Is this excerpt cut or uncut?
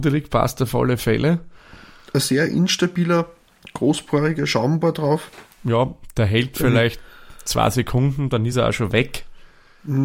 uncut